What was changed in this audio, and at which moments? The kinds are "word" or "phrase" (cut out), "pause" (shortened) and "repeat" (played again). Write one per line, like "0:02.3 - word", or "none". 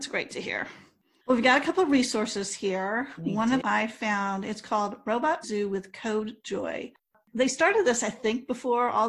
0:03.6 - word
0:05.4 - word